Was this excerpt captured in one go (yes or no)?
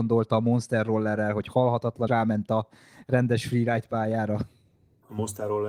no